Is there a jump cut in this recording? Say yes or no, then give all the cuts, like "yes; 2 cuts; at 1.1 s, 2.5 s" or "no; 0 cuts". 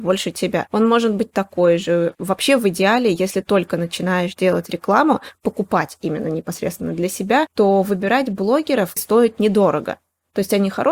yes; 1 cut; at 9.0 s